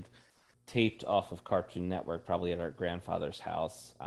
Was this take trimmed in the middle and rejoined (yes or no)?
no